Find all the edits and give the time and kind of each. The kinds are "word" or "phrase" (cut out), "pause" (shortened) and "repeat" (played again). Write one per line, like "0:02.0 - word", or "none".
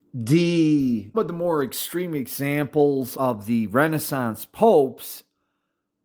0:01.1 - word
0:03.1 - phrase